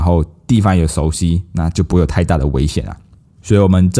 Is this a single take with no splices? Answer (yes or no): yes